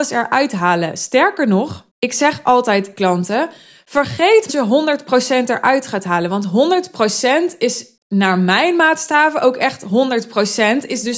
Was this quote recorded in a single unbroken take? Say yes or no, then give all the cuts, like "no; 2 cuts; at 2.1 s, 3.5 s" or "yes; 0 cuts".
no; 3 cuts; at 1.9 s, 2.9 s, 4.5 s